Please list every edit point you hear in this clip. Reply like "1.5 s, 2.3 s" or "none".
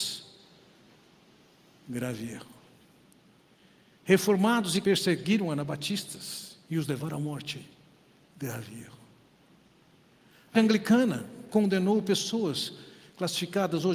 4.8 s, 10.5 s